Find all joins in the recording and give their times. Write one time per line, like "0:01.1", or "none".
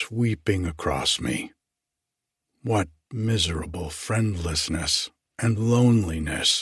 none